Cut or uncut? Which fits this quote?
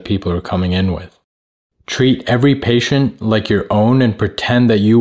uncut